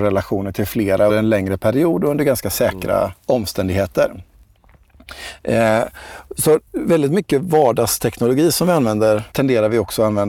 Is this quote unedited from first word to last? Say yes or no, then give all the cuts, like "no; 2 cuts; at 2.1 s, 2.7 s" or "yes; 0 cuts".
no; 4 cuts; at 1.1 s, 3.2 s, 6.7 s, 9.3 s